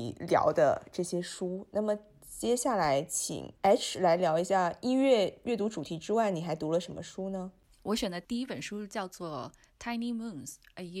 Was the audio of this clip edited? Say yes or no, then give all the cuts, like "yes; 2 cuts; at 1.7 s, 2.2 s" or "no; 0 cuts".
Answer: no; 0 cuts